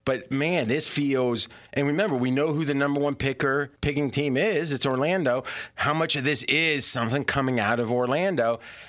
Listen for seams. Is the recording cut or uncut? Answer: cut